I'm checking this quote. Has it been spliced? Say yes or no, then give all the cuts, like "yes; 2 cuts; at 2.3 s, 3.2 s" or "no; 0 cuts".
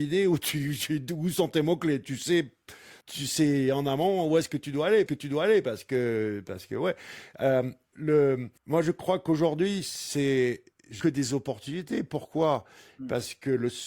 yes; 5 cuts; at 3.0 s, 5.1 s, 7.9 s, 8.6 s, 11.0 s